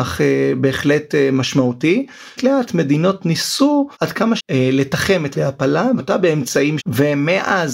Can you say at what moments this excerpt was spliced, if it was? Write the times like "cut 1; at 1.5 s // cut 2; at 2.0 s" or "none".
cut 1; at 2.4 s // cut 2; at 3.9 s // cut 3; at 4.4 s // cut 4; at 5.3 s // cut 5; at 6.0 s // cut 6; at 6.8 s